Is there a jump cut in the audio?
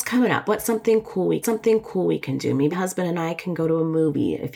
yes; 2 cuts; at 1.4 s, 2.7 s

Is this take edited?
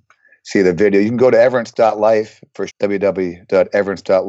yes; 1 cut; at 2.7 s

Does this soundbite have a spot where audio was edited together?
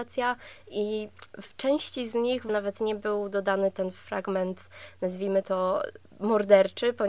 yes; 1 cut; at 2.5 s

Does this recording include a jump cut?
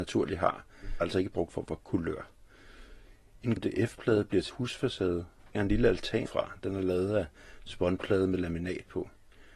yes; 6 cuts; at 1.0 s, 1.5 s, 3.6 s, 4.5 s, 5.5 s, 6.3 s

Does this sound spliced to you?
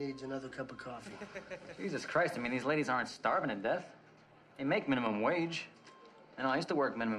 no; 0 cuts

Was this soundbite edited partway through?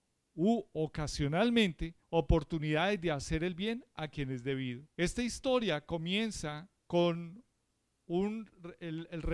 yes; 3 cuts; at 2.0 s, 4.9 s, 6.8 s

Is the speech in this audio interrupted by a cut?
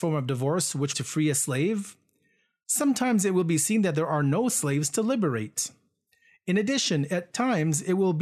yes; 1 cut; at 0.9 s

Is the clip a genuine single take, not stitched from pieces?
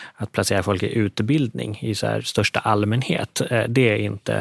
yes; 0 cuts

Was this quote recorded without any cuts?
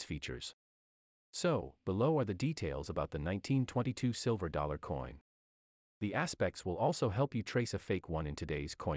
yes; 0 cuts

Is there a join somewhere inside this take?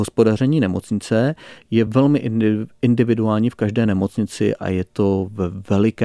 no; 0 cuts

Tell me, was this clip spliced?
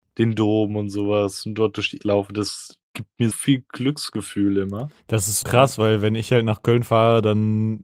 yes; 4 cuts; at 2.0 s, 2.8 s, 3.3 s, 5.4 s

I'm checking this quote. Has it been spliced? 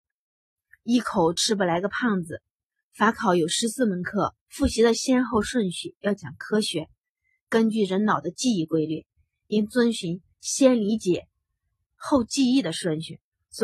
yes; 1 cut; at 4.4 s

